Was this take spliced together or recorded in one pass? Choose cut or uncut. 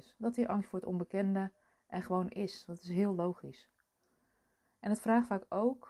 uncut